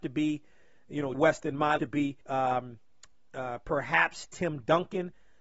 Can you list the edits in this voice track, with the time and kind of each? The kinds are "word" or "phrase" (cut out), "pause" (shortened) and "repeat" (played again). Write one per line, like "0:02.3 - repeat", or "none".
0:01.1 - word
0:01.8 - phrase
0:02.2 - pause